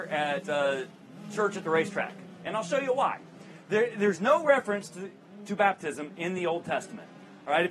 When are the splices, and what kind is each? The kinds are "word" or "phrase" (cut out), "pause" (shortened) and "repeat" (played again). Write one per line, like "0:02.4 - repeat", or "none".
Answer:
none